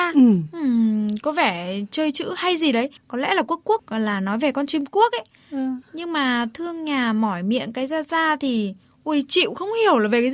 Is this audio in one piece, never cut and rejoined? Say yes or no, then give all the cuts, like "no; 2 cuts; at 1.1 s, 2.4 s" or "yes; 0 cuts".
yes; 0 cuts